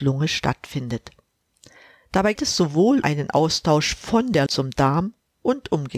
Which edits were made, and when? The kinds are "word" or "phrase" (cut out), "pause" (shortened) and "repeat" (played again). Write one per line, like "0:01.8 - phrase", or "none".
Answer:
0:02.4 - word
0:03.0 - word
0:04.5 - word